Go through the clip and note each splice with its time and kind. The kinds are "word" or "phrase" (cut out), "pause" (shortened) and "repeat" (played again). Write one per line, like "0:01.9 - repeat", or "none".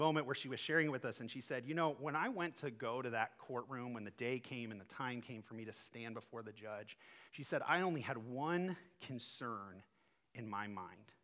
0:07.3 - pause